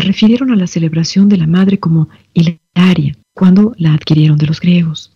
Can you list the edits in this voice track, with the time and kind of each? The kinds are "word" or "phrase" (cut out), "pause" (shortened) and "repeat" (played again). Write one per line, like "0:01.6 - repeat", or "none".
0:03.2 - pause